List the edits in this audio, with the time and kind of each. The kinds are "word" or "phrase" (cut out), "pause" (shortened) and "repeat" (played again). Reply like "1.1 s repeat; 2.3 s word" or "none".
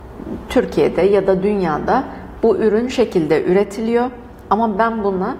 2.9 s word